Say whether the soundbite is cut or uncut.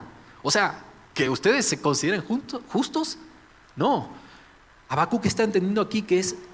uncut